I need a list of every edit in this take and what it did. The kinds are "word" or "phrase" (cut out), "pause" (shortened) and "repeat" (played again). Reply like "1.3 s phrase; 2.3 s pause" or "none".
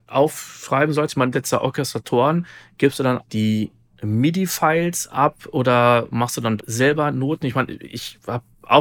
1.3 s word; 3.2 s word; 6.6 s word